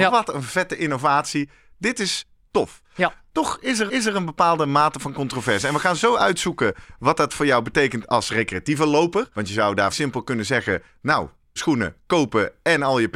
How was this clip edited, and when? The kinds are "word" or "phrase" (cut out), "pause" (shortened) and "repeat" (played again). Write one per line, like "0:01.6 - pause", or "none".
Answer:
0:03.9 - repeat
0:09.3 - pause
0:09.9 - word
0:11.6 - word